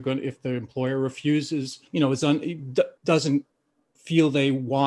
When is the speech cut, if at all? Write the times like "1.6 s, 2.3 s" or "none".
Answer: 1.9 s, 3.0 s